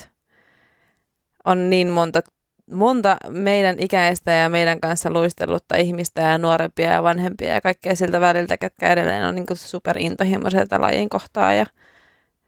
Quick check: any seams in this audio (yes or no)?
no